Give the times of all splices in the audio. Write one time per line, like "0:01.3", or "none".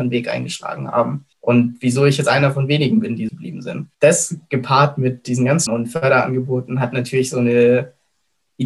0:01.3
0:03.3
0:03.9
0:05.7